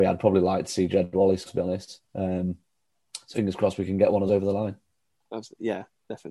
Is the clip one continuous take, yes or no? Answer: no